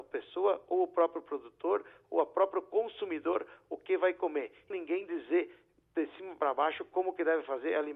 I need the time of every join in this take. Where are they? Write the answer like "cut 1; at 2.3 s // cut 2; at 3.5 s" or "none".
cut 1; at 4.7 s